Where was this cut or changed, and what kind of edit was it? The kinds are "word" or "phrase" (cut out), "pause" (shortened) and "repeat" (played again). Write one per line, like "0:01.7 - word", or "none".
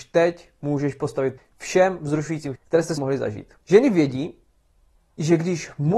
0:01.4 - word
0:02.6 - word
0:03.0 - word
0:03.6 - pause